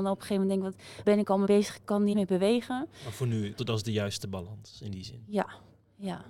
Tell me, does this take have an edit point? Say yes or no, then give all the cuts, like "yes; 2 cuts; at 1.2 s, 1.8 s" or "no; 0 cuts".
yes; 4 cuts; at 1.1 s, 1.5 s, 2.1 s, 3.6 s